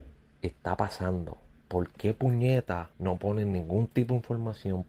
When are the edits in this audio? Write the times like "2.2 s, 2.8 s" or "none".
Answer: 1.5 s, 2.9 s